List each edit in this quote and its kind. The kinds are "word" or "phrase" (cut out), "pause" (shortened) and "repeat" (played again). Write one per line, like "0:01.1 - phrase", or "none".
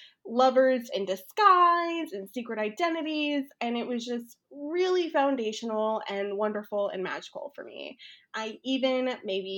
none

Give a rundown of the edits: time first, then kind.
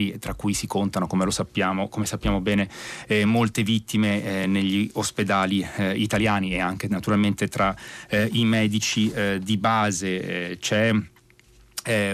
none

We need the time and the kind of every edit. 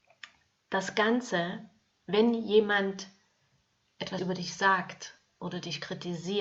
0:04.2 - word

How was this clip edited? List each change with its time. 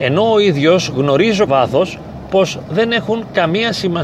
0:01.5 - word

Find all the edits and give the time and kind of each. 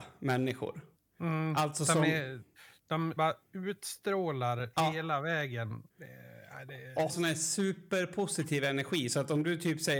0:01.0 - pause
0:03.2 - word
0:04.7 - word
0:05.9 - pause
0:07.1 - word

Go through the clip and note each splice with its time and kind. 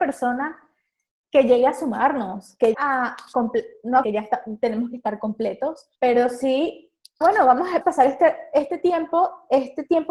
0:02.7 - word
0:04.0 - phrase
0:05.9 - pause
0:07.2 - word
0:07.8 - word

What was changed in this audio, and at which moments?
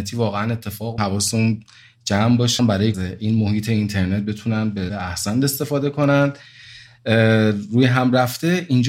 0:01.0 - phrase
0:02.6 - word
0:02.9 - phrase
0:04.9 - word

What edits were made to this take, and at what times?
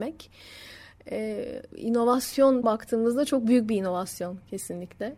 0:02.6 - word

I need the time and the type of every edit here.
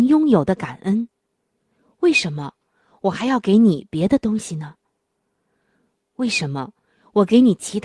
none

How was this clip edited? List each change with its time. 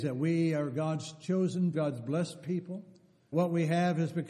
0:01.7 - word
0:03.3 - word

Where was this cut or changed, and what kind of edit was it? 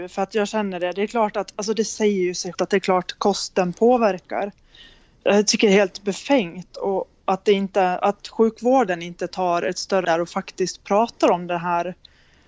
0:02.5 - word
0:08.0 - word
0:10.0 - word

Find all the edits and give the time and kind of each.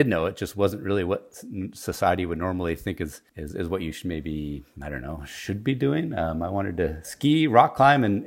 0:03.3 - pause

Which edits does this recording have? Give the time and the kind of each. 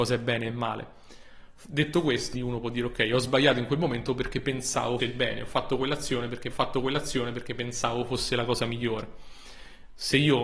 0:02.3 - word
0:05.0 - word
0:06.5 - repeat

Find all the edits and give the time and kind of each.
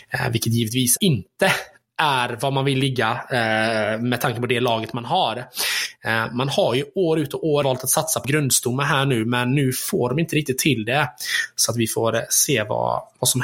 0:01.0 - word
0:07.6 - word
0:08.2 - word

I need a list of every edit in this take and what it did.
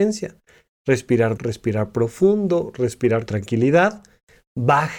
0:01.4 - word
0:03.3 - word

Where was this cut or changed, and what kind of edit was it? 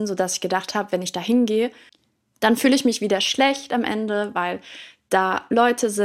none

